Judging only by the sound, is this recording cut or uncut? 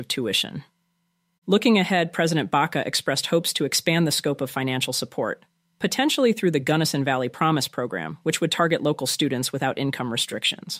uncut